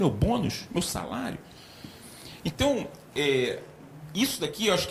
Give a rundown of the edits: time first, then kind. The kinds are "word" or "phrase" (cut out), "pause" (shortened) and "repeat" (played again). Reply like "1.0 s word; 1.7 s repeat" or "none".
none